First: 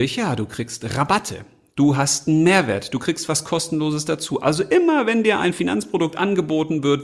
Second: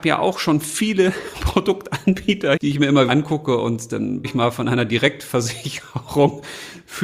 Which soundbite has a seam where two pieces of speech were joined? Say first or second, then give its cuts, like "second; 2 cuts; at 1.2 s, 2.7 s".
second; 3 cuts; at 2.6 s, 3.1 s, 4.2 s